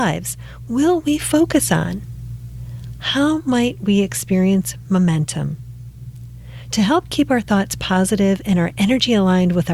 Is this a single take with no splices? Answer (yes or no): yes